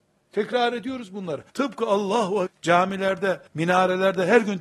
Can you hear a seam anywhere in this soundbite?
yes; 3 cuts; at 1.5 s, 2.5 s, 3.5 s

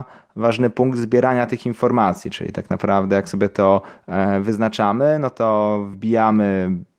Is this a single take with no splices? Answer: yes; 0 cuts

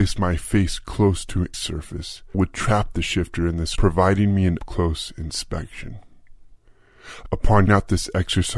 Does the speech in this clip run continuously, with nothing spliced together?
no; 5 cuts; at 1.5 s, 2.3 s, 3.8 s, 4.6 s, 7.7 s

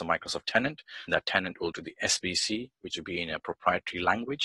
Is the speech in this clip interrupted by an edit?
yes; 3 cuts; at 1.1 s, 1.7 s, 2.9 s

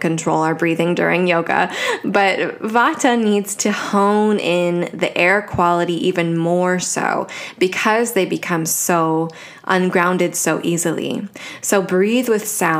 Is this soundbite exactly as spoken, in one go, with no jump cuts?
yes; 0 cuts

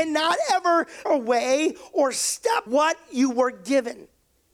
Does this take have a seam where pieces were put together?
yes; 2 cuts; at 1.1 s, 2.7 s

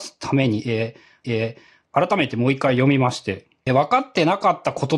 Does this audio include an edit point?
yes; 2 cuts; at 1.2 s, 3.7 s

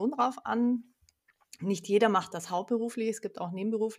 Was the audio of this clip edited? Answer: no; 0 cuts

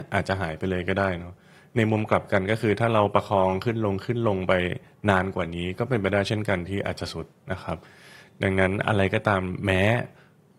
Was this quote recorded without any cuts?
yes; 0 cuts

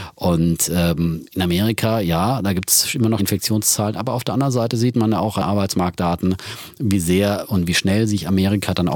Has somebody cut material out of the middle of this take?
yes; 2 cuts; at 3.2 s, 5.4 s

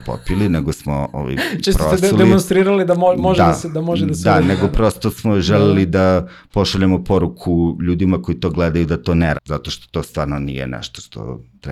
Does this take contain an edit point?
yes; 1 cut; at 9.3 s

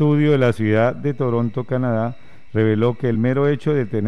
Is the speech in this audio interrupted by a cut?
no; 0 cuts

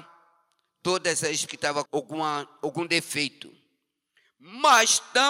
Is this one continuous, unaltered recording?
no; 2 cuts; at 1.5 s, 1.9 s

